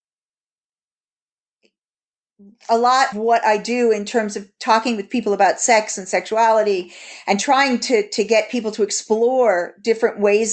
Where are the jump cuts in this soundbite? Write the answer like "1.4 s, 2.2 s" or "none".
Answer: 3.1 s